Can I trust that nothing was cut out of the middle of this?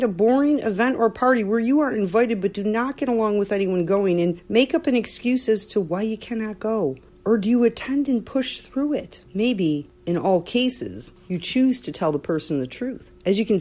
yes; 0 cuts

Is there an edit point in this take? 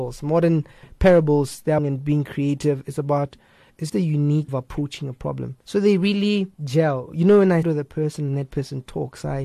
yes; 6 cuts; at 1.8 s, 3.9 s, 4.5 s, 5.6 s, 6.5 s, 7.6 s

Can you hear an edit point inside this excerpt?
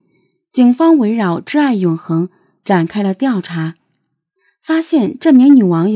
no; 0 cuts

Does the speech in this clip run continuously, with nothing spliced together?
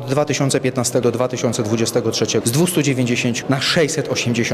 no; 3 cuts; at 1.0 s, 2.4 s, 3.4 s

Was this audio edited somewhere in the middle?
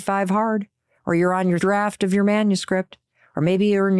yes; 1 cut; at 1.6 s

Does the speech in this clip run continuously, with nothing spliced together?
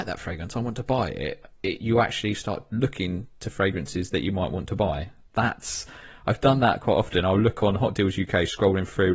no; 1 cut; at 1.5 s

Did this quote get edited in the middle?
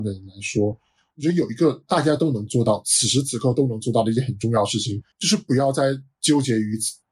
yes; 1 cut; at 5.1 s

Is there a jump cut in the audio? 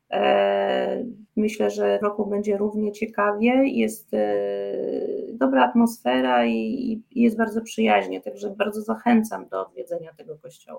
yes; 2 cuts; at 1.3 s, 2.0 s

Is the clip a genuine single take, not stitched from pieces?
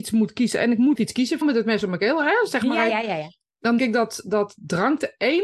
no; 4 cuts; at 1.0 s, 1.4 s, 2.9 s, 3.8 s

